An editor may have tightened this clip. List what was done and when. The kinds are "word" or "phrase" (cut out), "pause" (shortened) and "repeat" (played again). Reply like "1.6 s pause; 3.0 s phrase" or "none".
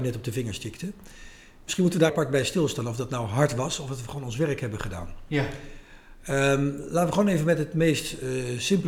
2.1 s word